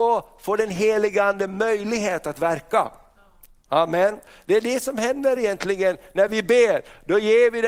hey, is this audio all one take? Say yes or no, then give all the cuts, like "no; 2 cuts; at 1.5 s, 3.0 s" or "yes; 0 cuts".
yes; 0 cuts